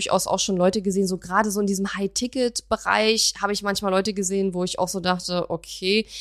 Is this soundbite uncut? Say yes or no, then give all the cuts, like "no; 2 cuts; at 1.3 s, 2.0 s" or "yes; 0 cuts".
yes; 0 cuts